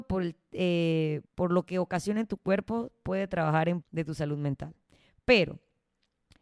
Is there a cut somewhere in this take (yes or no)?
yes